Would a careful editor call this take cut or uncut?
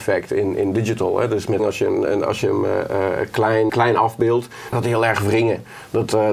cut